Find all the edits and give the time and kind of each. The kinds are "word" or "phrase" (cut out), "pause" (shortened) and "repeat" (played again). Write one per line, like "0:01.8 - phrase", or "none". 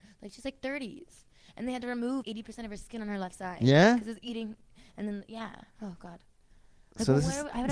0:02.2 - word